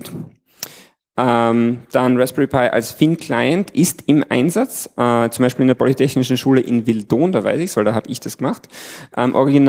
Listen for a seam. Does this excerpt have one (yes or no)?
no